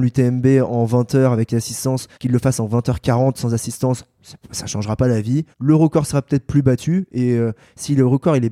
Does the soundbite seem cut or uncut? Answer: cut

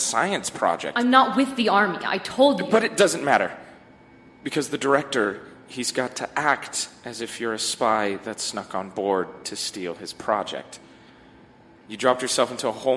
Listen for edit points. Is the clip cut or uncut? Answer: uncut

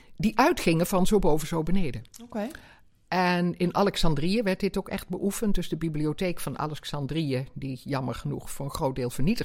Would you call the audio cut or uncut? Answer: uncut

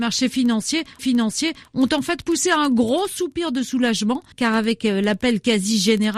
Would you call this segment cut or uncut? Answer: cut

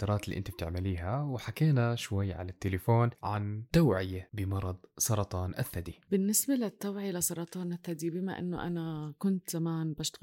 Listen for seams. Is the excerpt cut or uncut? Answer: uncut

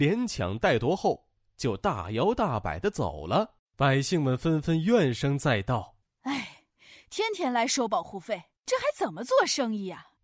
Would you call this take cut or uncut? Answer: uncut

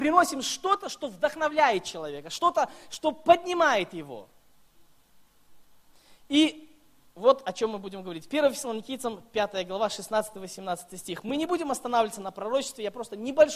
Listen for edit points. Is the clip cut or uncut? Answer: uncut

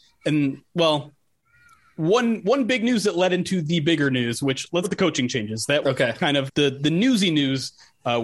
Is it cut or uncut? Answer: cut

